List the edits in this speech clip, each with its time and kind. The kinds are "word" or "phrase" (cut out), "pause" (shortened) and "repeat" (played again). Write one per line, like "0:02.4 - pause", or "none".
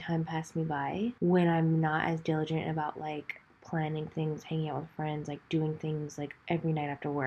0:01.2 - pause